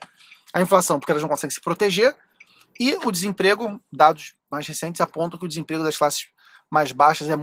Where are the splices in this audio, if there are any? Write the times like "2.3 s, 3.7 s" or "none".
none

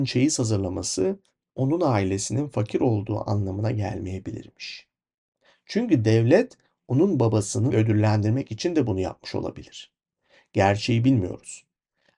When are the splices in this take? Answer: 7.7 s

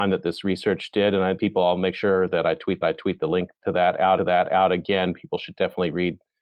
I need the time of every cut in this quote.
1.4 s, 2.8 s, 4.2 s

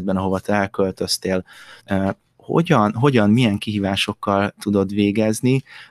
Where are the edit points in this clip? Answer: 1.8 s

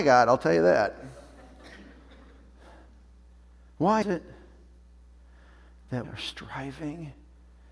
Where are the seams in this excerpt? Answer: 4.0 s, 6.0 s

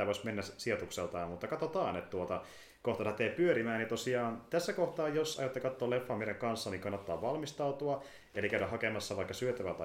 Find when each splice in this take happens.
none

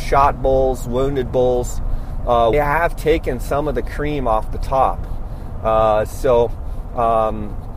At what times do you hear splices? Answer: 2.5 s

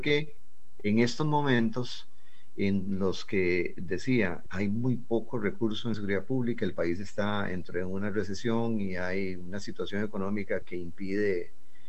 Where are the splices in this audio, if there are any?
4.5 s, 5.9 s, 10.6 s

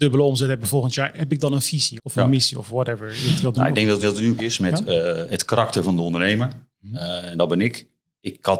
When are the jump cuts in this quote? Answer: 2.0 s, 4.0 s, 4.4 s, 5.3 s

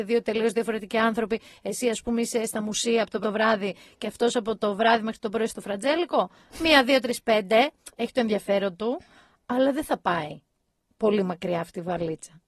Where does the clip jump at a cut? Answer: 3.2 s

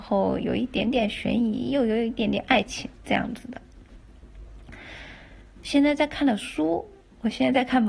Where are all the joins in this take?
2.9 s

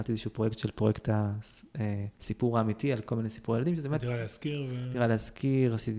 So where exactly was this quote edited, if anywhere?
2.1 s

